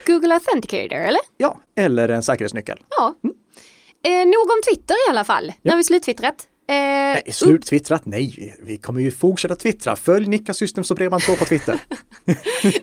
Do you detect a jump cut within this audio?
no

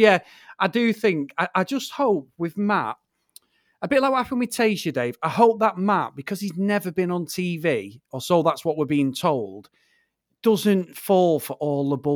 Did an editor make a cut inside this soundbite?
no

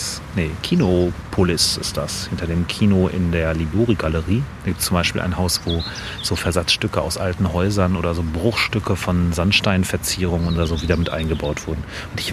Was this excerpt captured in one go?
yes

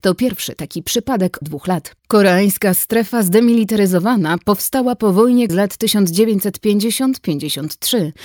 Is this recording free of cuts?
no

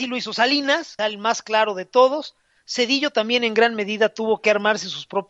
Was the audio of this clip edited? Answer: yes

